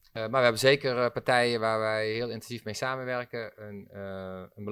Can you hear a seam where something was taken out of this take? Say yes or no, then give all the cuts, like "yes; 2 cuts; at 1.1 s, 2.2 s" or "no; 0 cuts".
no; 0 cuts